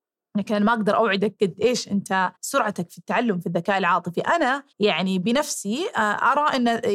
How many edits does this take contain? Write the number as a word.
two